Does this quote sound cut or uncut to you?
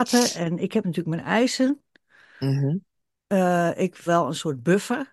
cut